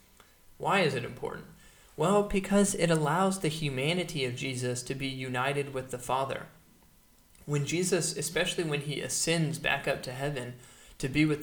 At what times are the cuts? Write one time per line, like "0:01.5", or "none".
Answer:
none